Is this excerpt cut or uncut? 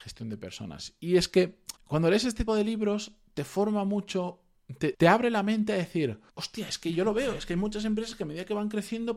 cut